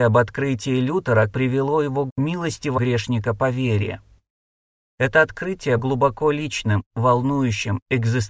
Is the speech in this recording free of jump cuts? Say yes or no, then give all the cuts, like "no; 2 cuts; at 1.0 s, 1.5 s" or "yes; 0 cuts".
no; 4 cuts; at 1.3 s, 2.1 s, 2.8 s, 5.8 s